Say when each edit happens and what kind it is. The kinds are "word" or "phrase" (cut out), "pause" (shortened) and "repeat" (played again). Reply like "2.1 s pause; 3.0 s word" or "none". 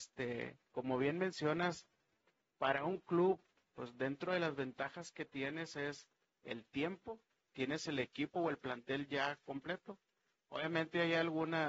none